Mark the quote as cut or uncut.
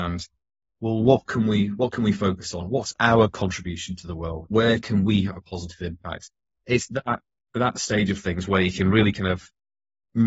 uncut